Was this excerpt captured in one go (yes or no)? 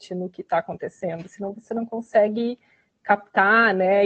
yes